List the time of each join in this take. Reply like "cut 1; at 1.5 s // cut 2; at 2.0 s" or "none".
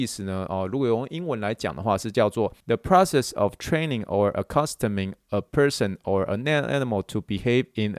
cut 1; at 2.6 s